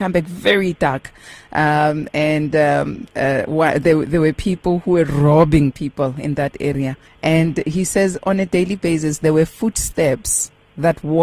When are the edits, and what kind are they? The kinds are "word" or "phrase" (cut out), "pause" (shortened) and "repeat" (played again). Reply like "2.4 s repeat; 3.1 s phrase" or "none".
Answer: 7.1 s pause